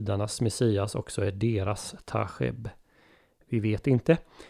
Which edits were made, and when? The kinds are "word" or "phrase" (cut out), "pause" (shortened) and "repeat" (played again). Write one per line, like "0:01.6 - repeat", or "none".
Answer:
none